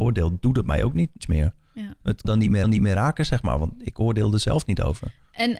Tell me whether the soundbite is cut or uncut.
cut